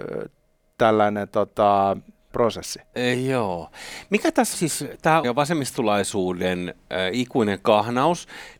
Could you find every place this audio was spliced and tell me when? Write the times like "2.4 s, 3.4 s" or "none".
2.3 s, 4.5 s, 5.2 s